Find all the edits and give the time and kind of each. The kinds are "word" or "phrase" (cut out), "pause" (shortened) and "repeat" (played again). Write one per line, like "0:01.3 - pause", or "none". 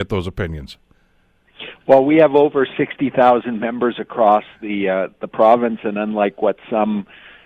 none